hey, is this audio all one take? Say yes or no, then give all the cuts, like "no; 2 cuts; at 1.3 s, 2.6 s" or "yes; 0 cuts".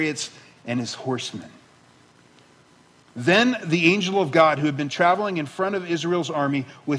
yes; 0 cuts